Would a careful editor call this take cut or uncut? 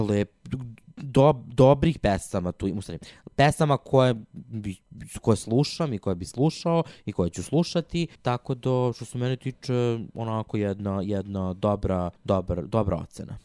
cut